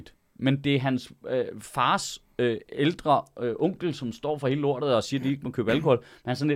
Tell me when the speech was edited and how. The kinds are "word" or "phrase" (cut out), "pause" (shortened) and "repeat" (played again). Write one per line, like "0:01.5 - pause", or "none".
none

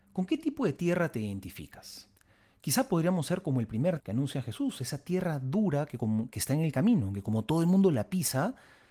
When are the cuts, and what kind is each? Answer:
0:04.0 - word

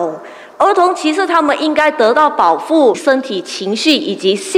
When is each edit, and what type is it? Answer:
0:02.9 - phrase

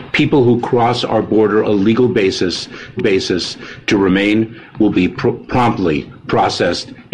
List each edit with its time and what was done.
0:01.6 - phrase
0:03.0 - repeat

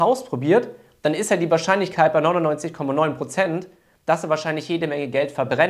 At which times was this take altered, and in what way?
none

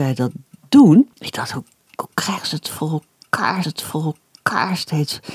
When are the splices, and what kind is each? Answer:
0:01.1 - pause
0:03.6 - repeat

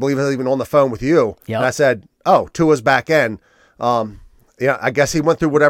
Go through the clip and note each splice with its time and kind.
none

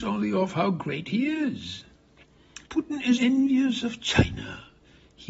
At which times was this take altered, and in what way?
0:02.7 - pause
0:03.2 - word

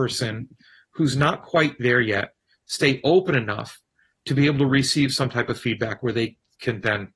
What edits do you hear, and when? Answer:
none

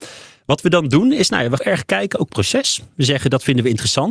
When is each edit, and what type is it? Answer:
0:01.6 - phrase
0:02.3 - phrase

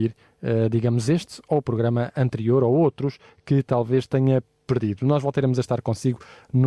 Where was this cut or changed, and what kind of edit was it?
none

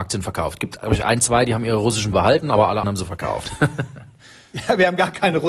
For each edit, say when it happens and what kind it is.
0:02.1 - word
0:02.8 - word

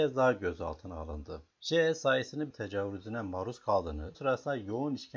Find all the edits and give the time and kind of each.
0:01.5 - pause
0:02.5 - phrase
0:04.1 - word

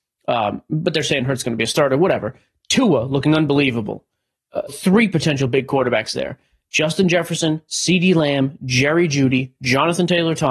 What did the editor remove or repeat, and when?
0:04.7 - word

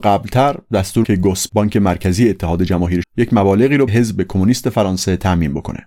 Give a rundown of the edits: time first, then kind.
0:01.0 - word
0:01.5 - word
0:03.0 - word
0:03.9 - word

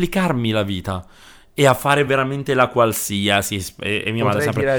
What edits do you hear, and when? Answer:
none

